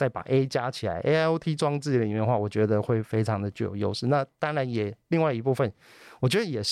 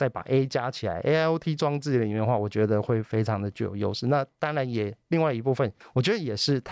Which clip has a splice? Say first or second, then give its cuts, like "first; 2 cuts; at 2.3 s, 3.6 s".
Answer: second; 1 cut; at 5.8 s